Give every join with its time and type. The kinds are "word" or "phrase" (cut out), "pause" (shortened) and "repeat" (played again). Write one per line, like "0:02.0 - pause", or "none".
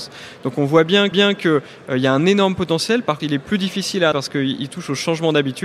0:01.1 - repeat
0:03.2 - word
0:04.1 - word